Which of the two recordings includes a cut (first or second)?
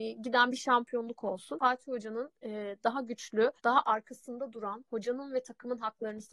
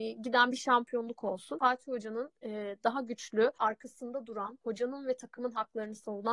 second